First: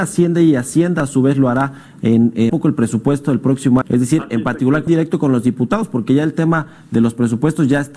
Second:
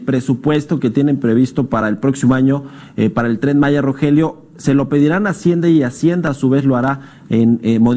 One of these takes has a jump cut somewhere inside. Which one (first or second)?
first